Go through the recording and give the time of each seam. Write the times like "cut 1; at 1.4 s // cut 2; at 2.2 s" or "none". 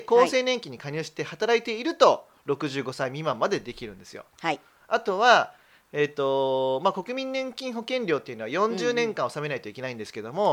none